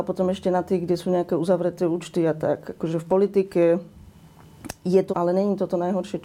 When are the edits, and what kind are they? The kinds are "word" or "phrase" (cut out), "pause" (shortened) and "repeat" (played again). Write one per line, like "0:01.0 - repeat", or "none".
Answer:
0:05.1 - word